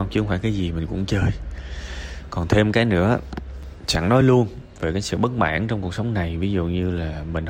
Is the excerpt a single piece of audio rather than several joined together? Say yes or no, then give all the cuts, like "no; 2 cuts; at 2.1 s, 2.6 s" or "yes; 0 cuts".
yes; 0 cuts